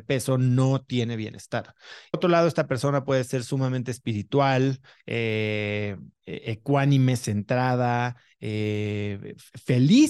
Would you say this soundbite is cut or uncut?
cut